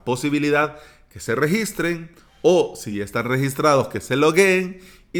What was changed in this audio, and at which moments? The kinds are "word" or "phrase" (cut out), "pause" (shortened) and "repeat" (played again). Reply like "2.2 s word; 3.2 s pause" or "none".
none